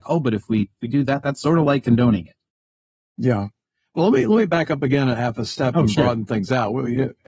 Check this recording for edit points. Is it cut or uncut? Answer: uncut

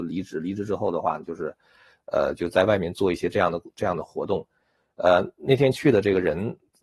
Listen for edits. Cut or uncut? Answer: uncut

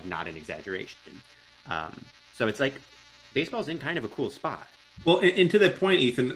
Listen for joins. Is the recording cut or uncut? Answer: uncut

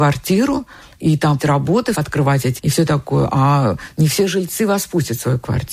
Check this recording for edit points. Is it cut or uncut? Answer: cut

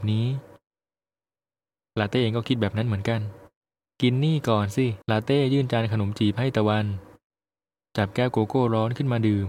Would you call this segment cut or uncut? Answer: cut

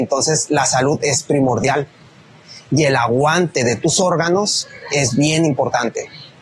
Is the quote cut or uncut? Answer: uncut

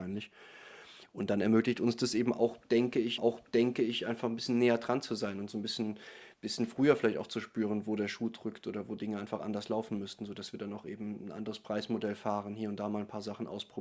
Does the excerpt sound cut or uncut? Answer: cut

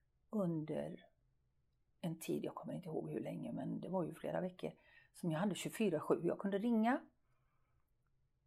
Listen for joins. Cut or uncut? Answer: uncut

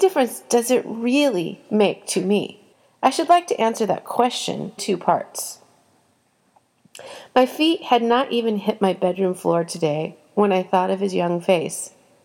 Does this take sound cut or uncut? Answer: cut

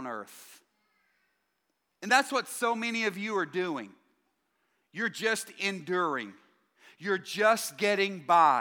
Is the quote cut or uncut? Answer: uncut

